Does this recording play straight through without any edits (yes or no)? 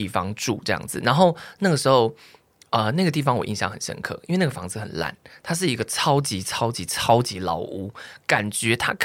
yes